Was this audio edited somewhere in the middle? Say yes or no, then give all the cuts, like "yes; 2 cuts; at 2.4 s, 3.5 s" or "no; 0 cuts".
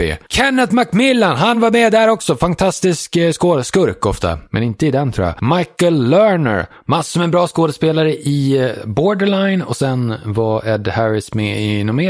no; 0 cuts